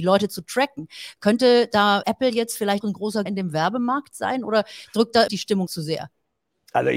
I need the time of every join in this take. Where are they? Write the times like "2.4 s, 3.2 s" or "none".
2.0 s, 2.8 s, 3.3 s, 5.3 s, 5.7 s